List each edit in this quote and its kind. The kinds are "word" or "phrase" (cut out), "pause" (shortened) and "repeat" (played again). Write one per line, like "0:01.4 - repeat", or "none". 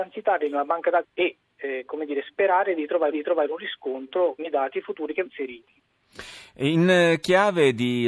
0:01.0 - word
0:03.1 - repeat
0:04.4 - word
0:05.3 - word

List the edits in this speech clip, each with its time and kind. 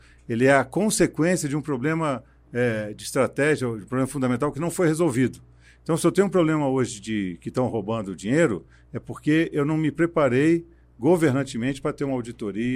none

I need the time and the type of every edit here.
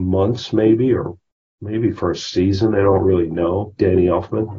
none

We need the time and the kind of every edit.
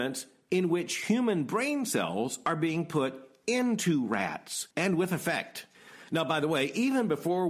0:04.7 - pause

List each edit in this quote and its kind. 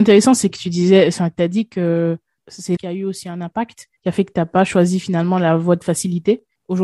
0:02.8 - word
0:04.0 - pause

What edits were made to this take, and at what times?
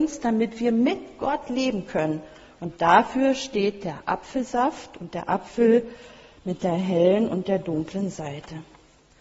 none

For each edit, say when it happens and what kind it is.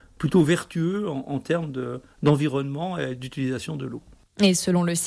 none

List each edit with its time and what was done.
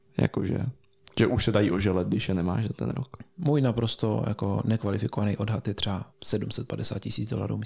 0:06.1 - pause

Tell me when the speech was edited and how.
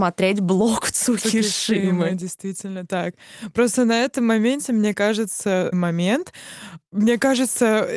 0:05.7 - phrase

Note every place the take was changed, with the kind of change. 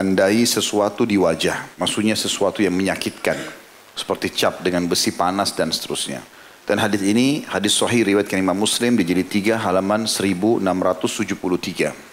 0:01.7 - pause
0:06.3 - pause

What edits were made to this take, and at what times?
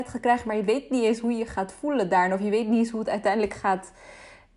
none

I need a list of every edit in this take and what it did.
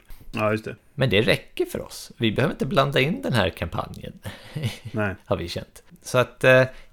none

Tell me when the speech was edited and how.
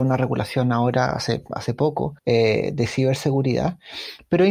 0:02.2 - pause

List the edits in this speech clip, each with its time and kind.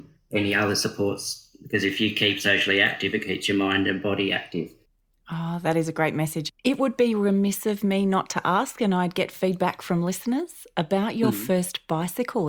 0:04.9 - pause
0:06.6 - pause

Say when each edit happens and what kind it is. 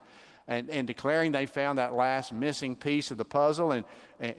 none

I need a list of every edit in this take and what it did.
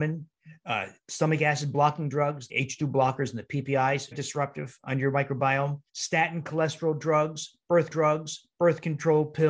0:02.5 - word
0:04.1 - word
0:05.9 - pause
0:07.9 - repeat

